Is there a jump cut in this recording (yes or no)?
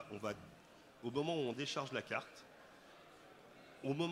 no